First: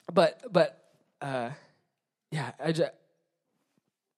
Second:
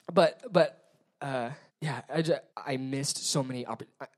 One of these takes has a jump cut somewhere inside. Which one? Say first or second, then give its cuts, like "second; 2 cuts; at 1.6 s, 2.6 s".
second; 2 cuts; at 1.7 s, 2.5 s